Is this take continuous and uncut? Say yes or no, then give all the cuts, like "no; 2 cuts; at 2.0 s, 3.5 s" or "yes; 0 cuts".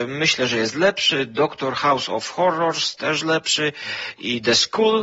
yes; 0 cuts